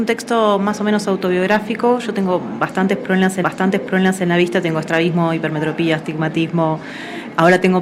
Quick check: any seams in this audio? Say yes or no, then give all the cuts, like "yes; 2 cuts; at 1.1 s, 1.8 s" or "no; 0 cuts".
yes; 1 cut; at 3.4 s